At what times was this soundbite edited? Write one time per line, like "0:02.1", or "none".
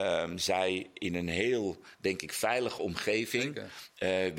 none